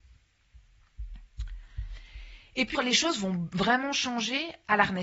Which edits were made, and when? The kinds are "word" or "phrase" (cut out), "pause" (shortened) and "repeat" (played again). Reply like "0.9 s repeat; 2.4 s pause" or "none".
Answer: 2.7 s word